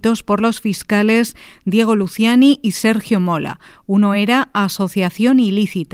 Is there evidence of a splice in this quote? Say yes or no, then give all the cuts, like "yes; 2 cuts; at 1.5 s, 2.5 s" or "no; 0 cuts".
no; 0 cuts